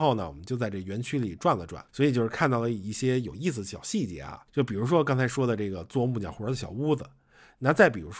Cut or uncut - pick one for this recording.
cut